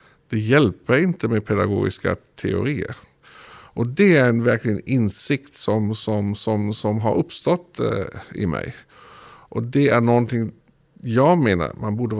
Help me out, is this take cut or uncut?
uncut